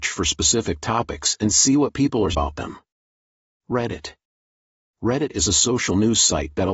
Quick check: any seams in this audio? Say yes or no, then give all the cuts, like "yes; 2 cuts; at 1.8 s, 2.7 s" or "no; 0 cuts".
yes; 1 cut; at 2.3 s